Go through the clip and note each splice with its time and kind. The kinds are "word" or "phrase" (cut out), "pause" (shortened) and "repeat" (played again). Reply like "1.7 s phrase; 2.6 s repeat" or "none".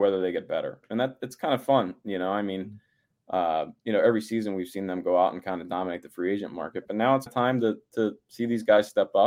7.3 s word